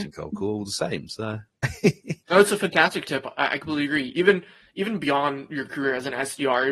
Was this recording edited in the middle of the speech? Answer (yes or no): no